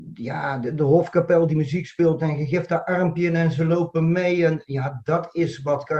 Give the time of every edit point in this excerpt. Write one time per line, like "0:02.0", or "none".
none